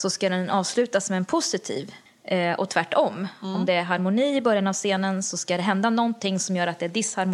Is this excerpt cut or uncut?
cut